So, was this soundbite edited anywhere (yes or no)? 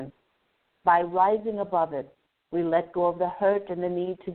no